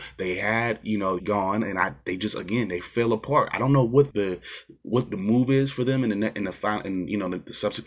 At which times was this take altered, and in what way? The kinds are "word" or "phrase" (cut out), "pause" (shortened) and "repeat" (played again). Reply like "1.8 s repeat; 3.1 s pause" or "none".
1.2 s word; 4.1 s word; 5.1 s word